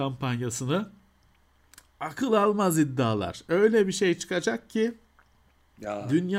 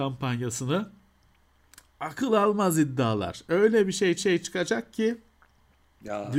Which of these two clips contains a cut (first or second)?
second